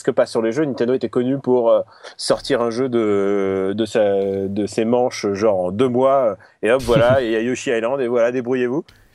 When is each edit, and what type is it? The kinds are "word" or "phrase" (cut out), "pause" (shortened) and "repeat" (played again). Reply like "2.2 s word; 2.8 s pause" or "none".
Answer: none